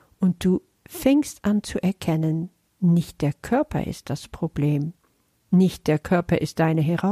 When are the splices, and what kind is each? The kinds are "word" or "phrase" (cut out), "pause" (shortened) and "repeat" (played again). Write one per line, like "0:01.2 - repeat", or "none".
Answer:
none

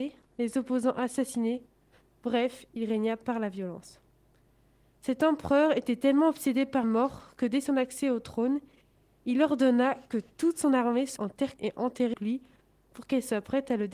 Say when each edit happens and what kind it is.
0:06.8 - word
0:11.2 - word
0:11.6 - word
0:12.1 - word

